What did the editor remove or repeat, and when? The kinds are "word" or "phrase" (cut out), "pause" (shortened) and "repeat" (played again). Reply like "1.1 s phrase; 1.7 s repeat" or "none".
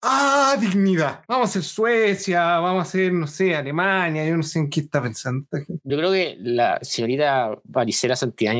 none